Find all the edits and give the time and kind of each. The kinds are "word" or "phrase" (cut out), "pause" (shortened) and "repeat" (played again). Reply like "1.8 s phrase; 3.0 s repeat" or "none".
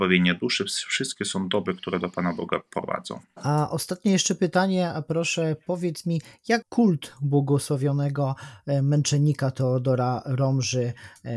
6.6 s word